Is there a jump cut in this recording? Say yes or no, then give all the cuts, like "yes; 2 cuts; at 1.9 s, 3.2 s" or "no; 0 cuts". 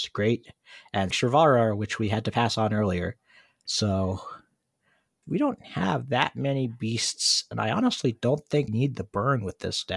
yes; 3 cuts; at 1.1 s, 5.2 s, 8.7 s